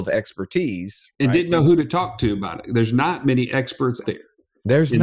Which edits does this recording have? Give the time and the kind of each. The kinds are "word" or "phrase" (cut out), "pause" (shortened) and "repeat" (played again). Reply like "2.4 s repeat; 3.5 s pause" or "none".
4.0 s word